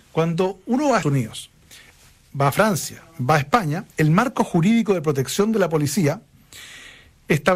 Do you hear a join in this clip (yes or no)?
yes